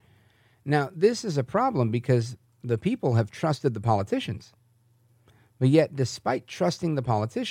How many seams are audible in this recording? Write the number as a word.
zero